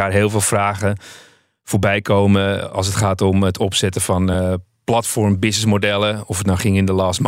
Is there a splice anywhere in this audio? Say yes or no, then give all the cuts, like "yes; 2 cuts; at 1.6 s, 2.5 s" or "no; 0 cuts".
no; 0 cuts